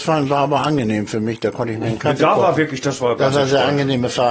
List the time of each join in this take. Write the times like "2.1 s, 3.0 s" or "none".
none